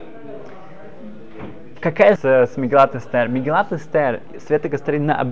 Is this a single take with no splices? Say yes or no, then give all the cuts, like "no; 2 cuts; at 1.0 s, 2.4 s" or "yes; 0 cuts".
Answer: no; 1 cut; at 2.2 s